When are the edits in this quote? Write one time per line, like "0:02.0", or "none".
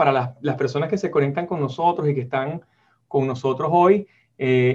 none